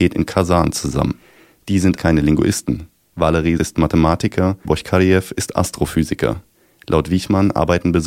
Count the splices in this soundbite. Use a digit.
3